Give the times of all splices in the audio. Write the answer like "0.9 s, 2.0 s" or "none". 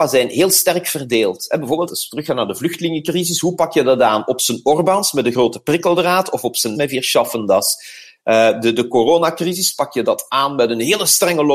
1.9 s, 6.7 s

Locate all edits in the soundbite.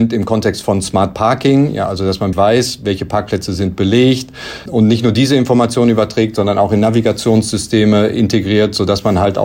2.3 s, 4.7 s

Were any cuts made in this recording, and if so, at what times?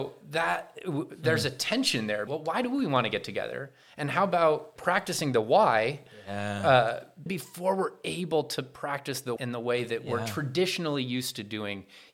2.3 s, 4.8 s, 7.3 s, 9.4 s

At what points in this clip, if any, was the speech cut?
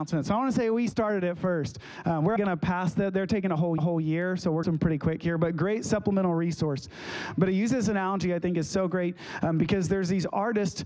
2.4 s, 3.8 s, 4.6 s

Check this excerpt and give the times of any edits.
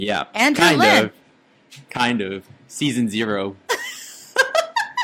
2.6 s

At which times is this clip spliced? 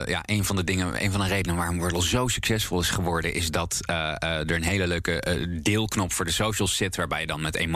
none

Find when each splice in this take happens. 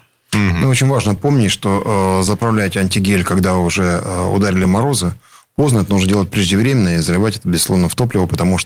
none

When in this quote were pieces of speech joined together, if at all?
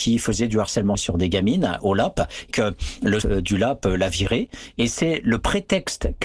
0.9 s, 2.5 s, 3.2 s

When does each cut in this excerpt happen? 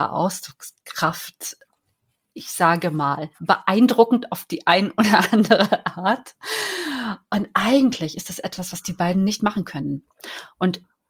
none

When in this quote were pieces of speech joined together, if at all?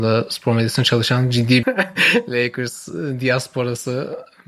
1.6 s

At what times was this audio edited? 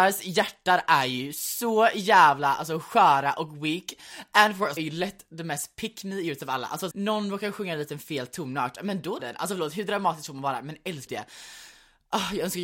4.8 s, 6.9 s, 9.2 s, 11.1 s

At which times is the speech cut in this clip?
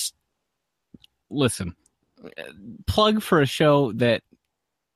none

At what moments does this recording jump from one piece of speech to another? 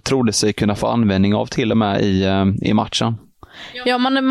none

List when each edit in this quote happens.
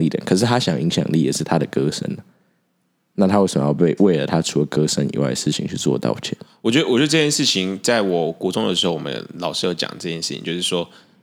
none

